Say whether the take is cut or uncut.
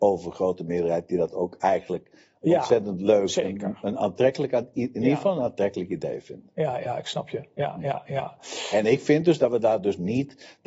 uncut